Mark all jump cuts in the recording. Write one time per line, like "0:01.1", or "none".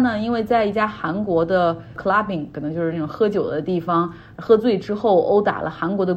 none